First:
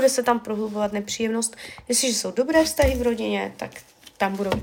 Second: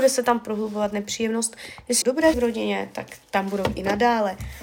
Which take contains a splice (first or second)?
second